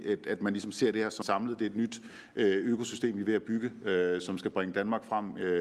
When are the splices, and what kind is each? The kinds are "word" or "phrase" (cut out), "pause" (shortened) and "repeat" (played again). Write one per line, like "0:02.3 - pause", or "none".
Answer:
0:01.2 - word